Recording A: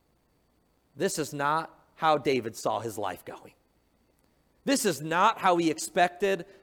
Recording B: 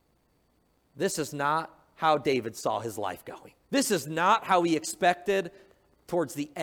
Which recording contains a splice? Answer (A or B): B